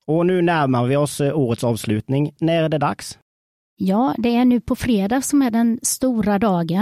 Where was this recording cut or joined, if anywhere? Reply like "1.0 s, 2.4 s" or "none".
none